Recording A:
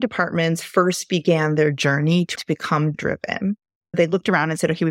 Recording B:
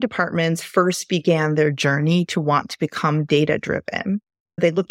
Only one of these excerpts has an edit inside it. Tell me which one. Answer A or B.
A